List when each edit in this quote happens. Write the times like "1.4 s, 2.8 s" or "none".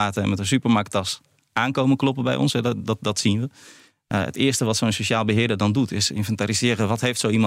none